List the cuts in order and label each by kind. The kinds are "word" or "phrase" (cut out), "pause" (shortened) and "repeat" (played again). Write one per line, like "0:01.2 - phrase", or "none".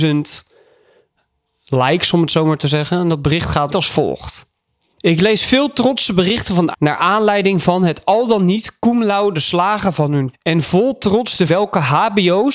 0:03.7 - word
0:06.7 - word
0:10.3 - word
0:11.5 - word

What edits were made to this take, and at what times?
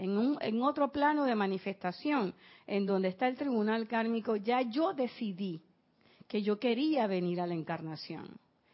none

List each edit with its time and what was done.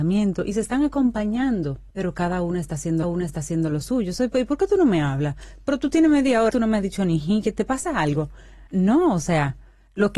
0:01.9 - pause
0:03.0 - repeat
0:06.5 - word
0:08.7 - pause

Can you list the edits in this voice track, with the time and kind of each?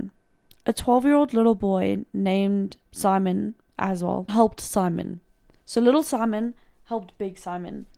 0:02.9 - pause
0:04.3 - phrase

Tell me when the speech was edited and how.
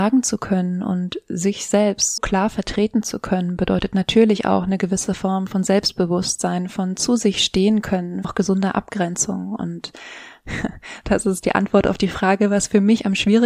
0:02.2 - word
0:08.2 - phrase

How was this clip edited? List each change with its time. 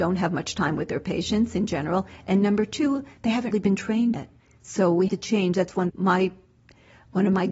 0:03.5 - word
0:04.1 - word
0:05.1 - word
0:05.9 - word

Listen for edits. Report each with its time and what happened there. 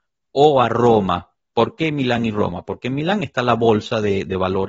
none

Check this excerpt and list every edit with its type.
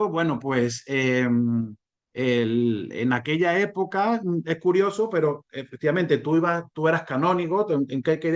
0:01.9 - pause

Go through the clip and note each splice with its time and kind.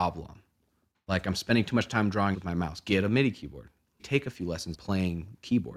0:02.3 - word
0:04.0 - word
0:04.7 - word

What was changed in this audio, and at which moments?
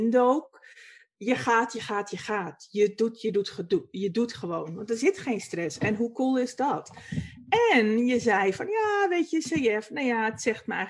none

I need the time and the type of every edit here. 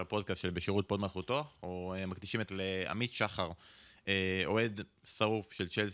0:02.5 - word

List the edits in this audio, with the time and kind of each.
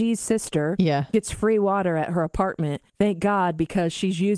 0:02.9 - pause

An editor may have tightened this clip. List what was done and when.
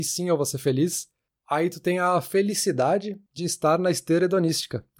none

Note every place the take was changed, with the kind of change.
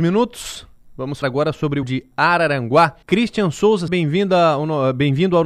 0:01.2 - word
0:01.8 - phrase
0:03.0 - pause
0:03.9 - word

